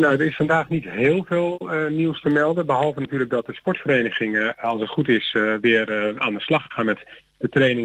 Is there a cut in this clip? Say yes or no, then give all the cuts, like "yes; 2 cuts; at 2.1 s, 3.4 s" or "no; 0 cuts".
no; 0 cuts